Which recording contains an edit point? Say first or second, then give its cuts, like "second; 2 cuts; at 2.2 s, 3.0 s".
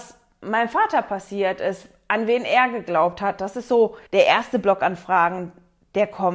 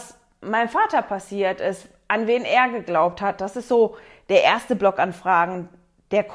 first; 1 cut; at 4.1 s